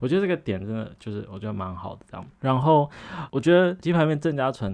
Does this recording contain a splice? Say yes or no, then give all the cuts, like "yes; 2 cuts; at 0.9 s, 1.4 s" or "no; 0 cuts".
yes; 1 cut; at 2.4 s